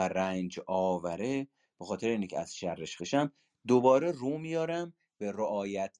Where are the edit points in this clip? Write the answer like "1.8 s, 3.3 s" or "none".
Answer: 3.0 s